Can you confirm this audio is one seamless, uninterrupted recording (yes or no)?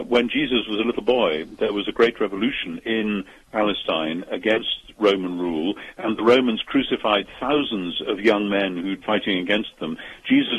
no